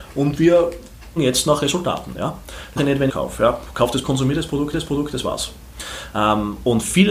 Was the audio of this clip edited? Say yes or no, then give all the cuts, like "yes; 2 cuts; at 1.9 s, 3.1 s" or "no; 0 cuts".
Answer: yes; 5 cuts; at 1.2 s, 2.8 s, 3.1 s, 4.0 s, 4.7 s